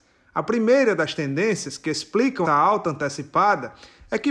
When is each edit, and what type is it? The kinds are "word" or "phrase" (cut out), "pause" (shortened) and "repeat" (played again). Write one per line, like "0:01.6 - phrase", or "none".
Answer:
0:02.4 - word